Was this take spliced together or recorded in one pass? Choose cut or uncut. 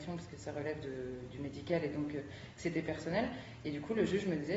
uncut